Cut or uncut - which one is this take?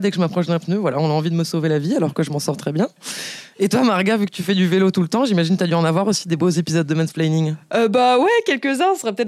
uncut